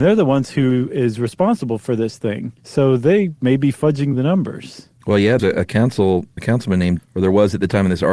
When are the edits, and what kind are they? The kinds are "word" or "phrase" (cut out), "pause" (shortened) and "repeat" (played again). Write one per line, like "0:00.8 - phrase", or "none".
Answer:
0:02.6 - pause
0:05.4 - word
0:06.4 - word
0:07.0 - phrase